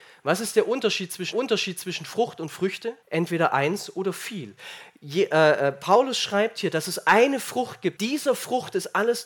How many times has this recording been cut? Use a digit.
3